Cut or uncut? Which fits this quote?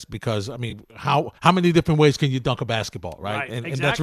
cut